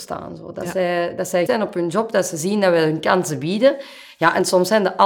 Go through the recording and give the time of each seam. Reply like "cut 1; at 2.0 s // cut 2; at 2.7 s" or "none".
cut 1; at 1.5 s